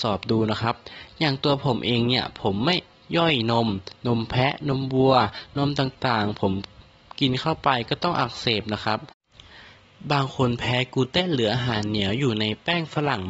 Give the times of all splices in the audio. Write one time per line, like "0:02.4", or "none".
none